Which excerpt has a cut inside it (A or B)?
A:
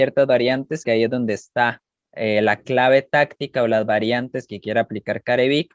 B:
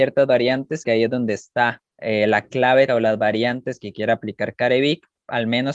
B